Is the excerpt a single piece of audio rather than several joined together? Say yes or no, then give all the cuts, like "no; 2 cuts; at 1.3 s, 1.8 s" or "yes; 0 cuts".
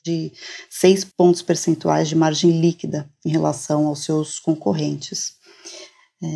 no; 1 cut; at 1.1 s